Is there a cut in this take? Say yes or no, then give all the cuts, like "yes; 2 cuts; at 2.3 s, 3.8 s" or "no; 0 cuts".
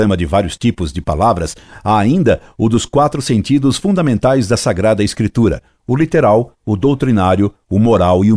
no; 0 cuts